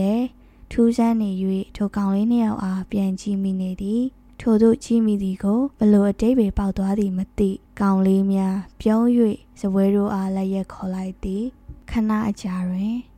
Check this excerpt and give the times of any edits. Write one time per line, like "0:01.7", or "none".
0:04.3
0:05.7
0:07.6
0:11.8